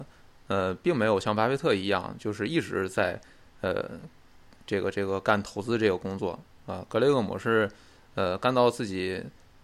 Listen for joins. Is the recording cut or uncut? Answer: uncut